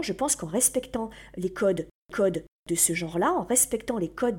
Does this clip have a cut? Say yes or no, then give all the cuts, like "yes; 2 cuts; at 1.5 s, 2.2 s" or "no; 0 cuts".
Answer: yes; 1 cut; at 2.1 s